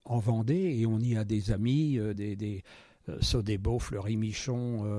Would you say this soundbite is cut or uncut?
uncut